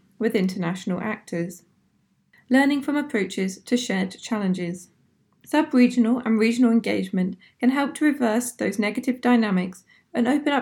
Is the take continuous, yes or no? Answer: yes